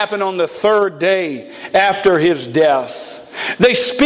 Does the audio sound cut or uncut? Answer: uncut